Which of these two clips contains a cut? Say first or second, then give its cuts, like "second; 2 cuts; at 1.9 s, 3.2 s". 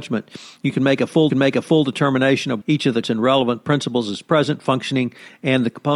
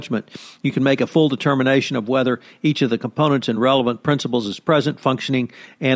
first; 3 cuts; at 1.3 s, 2.6 s, 3.0 s